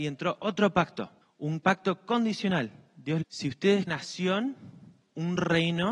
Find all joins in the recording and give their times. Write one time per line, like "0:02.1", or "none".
0:01.2
0:03.2
0:03.9

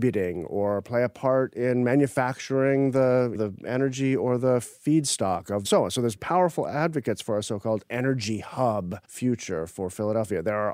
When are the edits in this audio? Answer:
0:03.3
0:05.6
0:06.2
0:09.0

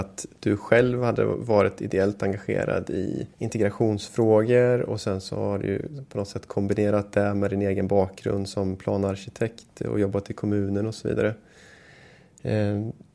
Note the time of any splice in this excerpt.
0:03.3

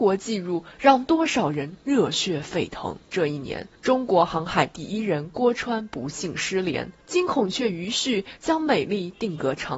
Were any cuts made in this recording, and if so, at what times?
0:03.0
0:03.7
0:07.0

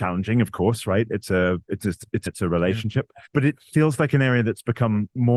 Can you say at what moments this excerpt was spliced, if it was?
0:02.3
0:03.3

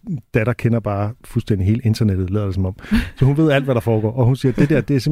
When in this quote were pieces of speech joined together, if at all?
none

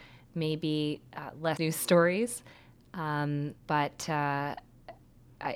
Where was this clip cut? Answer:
0:01.1
0:01.6
0:03.6

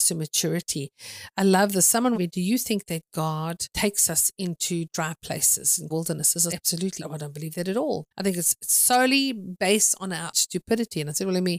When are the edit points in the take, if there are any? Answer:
0:02.1
0:03.7
0:05.9
0:06.5
0:07.0
0:08.1
0:10.3

